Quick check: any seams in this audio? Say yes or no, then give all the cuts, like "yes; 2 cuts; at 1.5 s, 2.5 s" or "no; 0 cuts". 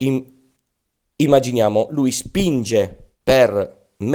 yes; 1 cut; at 3.2 s